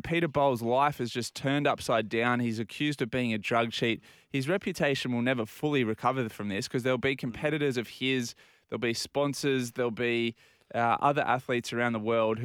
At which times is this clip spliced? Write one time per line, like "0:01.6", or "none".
none